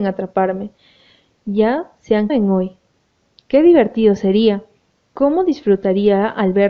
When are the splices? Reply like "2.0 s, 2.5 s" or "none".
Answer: 2.3 s